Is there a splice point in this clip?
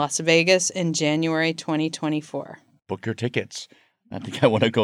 no; 0 cuts

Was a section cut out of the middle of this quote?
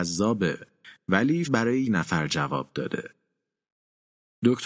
yes; 2 cuts; at 1.4 s, 1.8 s

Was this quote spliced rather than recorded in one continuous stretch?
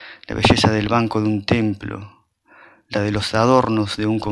no; 0 cuts

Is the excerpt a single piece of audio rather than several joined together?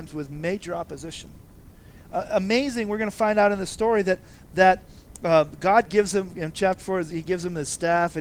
yes; 0 cuts

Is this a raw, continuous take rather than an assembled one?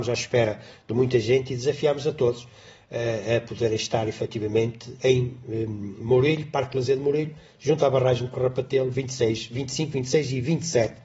yes; 0 cuts

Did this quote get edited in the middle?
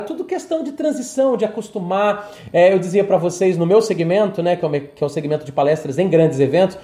no; 0 cuts

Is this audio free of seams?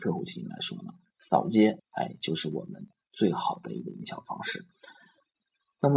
no; 1 cut; at 1.8 s

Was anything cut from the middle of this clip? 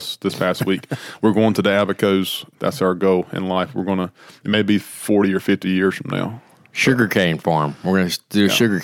no; 0 cuts

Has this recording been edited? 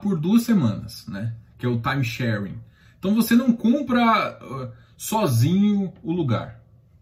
no; 0 cuts

